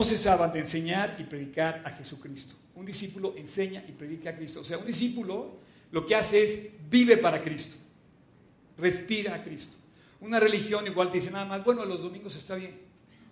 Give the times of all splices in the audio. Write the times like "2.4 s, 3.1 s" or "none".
none